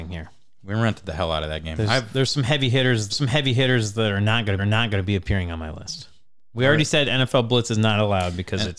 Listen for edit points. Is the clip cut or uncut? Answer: cut